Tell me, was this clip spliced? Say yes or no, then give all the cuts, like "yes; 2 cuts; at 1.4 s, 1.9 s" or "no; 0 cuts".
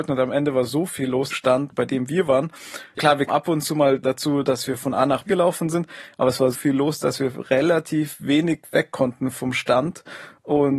yes; 5 cuts; at 1.3 s, 3.0 s, 3.3 s, 5.3 s, 6.5 s